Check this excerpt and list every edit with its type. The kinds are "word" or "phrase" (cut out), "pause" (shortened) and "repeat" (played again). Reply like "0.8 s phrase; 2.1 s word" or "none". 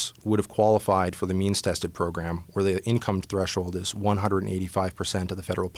none